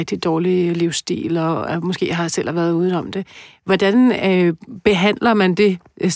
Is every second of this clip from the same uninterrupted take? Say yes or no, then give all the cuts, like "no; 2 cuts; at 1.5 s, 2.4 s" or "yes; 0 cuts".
yes; 0 cuts